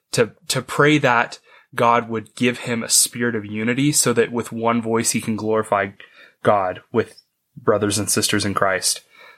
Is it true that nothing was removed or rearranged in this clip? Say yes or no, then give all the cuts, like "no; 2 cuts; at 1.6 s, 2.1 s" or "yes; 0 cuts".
yes; 0 cuts